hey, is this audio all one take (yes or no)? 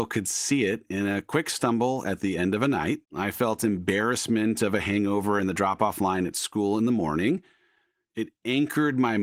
no